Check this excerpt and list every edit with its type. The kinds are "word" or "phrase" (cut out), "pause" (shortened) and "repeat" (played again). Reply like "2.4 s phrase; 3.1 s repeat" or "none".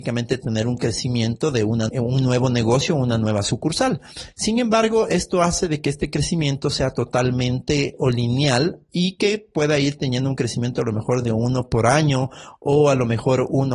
1.9 s word; 8.0 s word